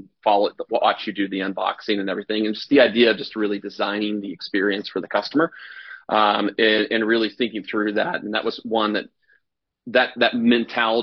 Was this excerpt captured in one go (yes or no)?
yes